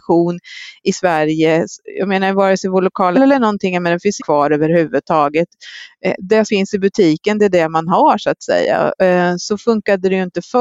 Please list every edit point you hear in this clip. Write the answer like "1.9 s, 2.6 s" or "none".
3.1 s, 4.2 s, 6.5 s